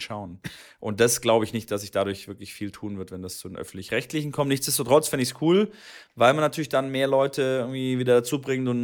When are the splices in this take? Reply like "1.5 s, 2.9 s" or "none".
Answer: none